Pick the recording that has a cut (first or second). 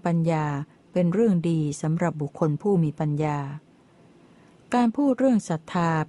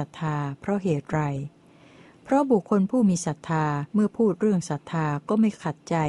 second